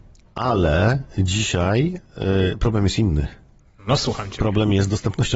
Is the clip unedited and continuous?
yes; 0 cuts

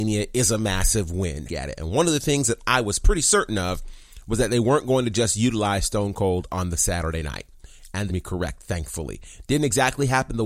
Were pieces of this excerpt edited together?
yes; 2 cuts; at 1.5 s, 8.1 s

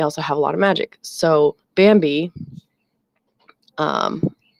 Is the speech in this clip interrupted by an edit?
yes; 1 cut; at 1.6 s

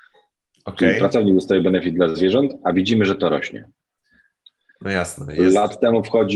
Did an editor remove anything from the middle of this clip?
no; 0 cuts

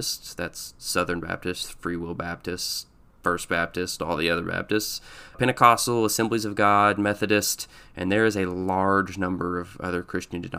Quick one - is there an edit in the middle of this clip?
yes; 1 cut; at 5.3 s

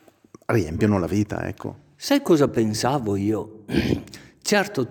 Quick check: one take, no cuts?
yes; 0 cuts

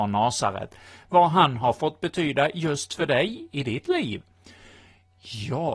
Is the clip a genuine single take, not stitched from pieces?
yes; 0 cuts

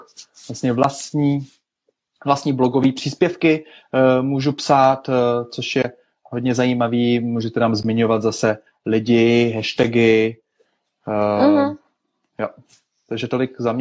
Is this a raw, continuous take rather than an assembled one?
yes; 0 cuts

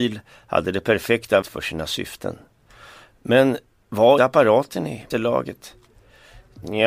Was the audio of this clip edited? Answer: yes; 3 cuts; at 1.4 s, 4.2 s, 5.1 s

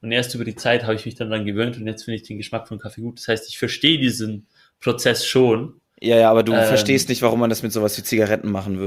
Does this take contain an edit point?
no; 0 cuts

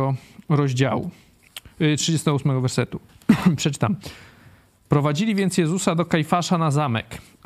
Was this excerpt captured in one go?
no; 1 cut; at 3.1 s

